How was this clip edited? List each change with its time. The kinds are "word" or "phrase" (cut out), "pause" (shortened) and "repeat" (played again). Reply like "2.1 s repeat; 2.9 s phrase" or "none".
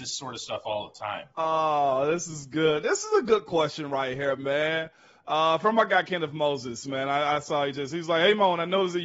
none